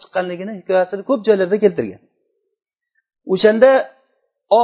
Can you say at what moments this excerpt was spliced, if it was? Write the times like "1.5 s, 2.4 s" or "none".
none